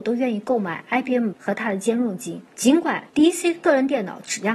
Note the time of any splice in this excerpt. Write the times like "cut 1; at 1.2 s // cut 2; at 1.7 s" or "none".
cut 1; at 1.3 s // cut 2; at 2.5 s // cut 3; at 3.1 s